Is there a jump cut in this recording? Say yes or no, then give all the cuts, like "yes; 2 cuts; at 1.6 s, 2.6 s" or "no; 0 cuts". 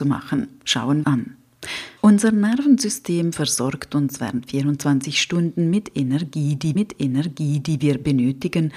yes; 3 cuts; at 1.0 s, 2.0 s, 6.8 s